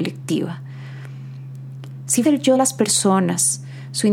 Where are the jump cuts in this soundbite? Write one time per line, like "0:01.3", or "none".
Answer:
0:02.2
0:02.5